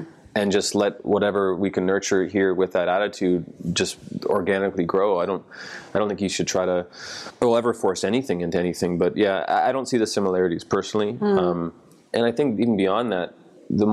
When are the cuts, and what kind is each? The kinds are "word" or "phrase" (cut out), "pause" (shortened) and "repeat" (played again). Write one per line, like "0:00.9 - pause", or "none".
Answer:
none